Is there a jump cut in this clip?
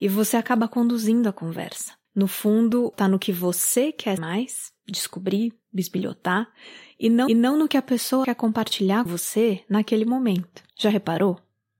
yes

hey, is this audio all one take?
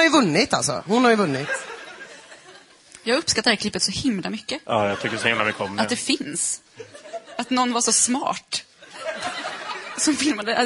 yes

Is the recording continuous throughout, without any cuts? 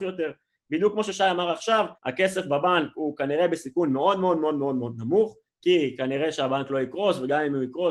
no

